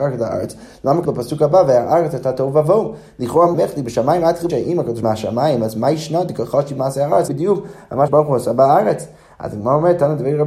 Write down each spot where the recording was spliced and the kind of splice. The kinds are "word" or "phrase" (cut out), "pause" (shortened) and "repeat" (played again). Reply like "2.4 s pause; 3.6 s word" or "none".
1.0 s word; 3.5 s word; 4.5 s word; 5.0 s phrase; 7.3 s phrase; 8.1 s word